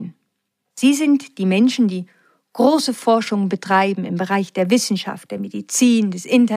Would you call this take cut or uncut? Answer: uncut